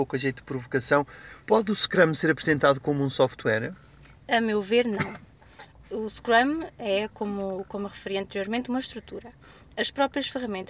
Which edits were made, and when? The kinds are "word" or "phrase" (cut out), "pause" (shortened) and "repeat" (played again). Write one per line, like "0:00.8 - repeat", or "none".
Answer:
0:01.4 - pause
0:04.2 - pause